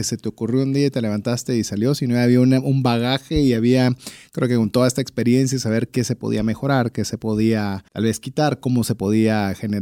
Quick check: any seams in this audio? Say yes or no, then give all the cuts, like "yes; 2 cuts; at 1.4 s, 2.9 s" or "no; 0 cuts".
yes; 1 cut; at 7.9 s